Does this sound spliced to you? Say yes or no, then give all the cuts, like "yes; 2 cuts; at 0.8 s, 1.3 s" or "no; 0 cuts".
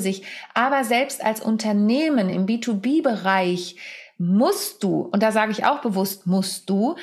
no; 0 cuts